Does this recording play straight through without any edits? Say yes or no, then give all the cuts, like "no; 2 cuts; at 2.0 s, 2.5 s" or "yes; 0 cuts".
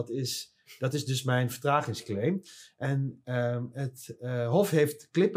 yes; 0 cuts